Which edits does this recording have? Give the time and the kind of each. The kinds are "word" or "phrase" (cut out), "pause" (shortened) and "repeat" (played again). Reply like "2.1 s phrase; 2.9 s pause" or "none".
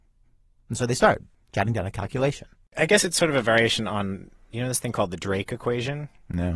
none